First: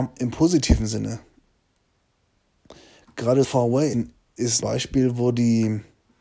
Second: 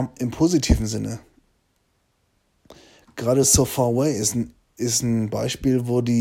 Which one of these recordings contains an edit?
first; 3 cuts; at 3.4 s, 3.9 s, 4.6 s

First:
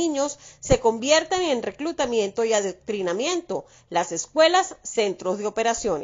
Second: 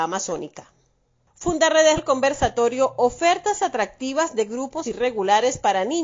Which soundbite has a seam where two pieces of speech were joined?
second; 2 cuts; at 2.0 s, 4.8 s

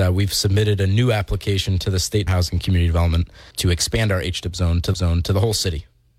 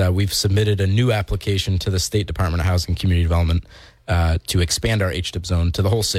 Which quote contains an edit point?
first; 3 cuts; at 2.3 s, 3.5 s, 4.9 s

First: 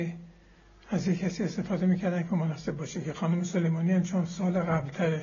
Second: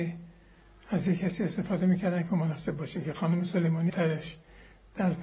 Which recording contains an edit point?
second; 1 cut; at 3.9 s

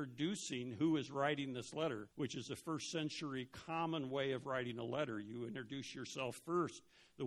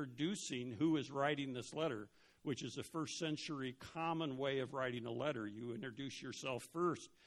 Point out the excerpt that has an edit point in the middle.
first; 1 cut; at 2.1 s

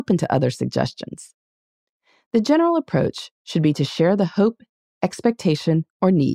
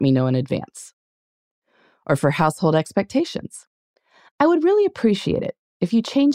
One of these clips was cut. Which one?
first; 1 cut; at 3.3 s

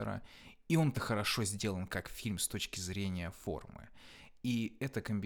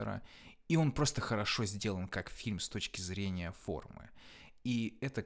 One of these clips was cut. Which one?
first; 1 cut; at 0.9 s

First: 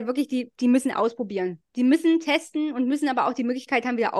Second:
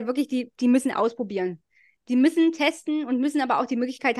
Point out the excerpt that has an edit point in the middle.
first; 1 cut; at 1.7 s

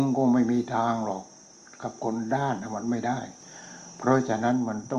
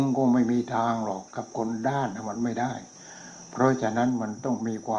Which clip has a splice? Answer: second; 1 cut; at 1.3 s

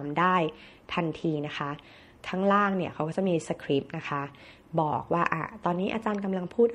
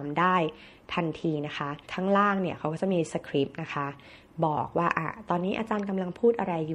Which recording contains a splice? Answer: second; 1 cut; at 1.8 s

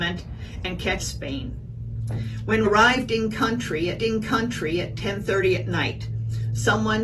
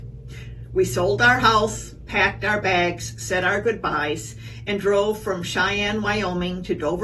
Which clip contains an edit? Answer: first; 3 cuts; at 1.0 s, 2.6 s, 4.0 s

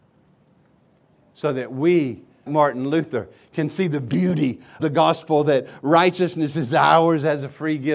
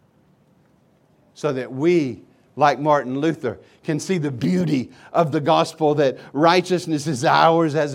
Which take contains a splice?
first; 2 cuts; at 2.5 s, 4.8 s

